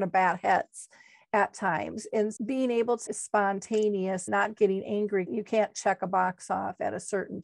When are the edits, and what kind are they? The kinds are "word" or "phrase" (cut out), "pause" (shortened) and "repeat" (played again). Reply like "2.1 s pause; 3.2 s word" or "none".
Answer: 2.4 s word; 3.1 s word; 4.3 s word; 5.3 s word